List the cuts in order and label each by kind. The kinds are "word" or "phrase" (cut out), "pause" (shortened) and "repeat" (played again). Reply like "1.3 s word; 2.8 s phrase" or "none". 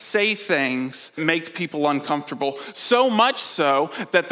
1.2 s word